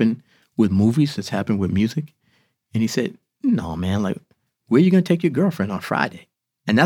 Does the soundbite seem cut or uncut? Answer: uncut